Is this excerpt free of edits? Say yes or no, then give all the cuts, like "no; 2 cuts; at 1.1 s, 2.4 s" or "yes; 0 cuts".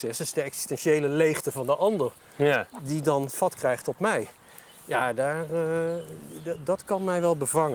yes; 0 cuts